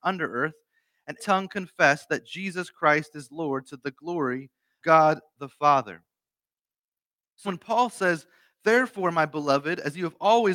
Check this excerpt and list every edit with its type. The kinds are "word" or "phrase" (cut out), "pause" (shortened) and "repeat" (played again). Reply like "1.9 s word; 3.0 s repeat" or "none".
1.2 s word; 4.8 s word; 7.4 s word